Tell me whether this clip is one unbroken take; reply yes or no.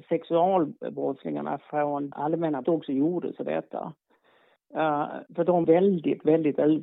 no